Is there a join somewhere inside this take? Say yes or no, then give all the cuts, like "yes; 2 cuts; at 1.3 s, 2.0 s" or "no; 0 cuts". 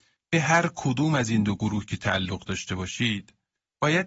no; 0 cuts